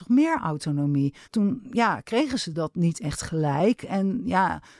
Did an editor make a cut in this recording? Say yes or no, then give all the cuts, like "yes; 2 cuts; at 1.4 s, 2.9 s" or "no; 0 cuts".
yes; 1 cut; at 1.2 s